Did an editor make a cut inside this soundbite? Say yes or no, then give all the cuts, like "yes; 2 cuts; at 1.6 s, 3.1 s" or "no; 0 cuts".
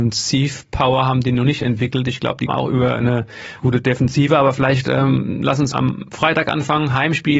yes; 3 cuts; at 2.5 s, 3.6 s, 5.7 s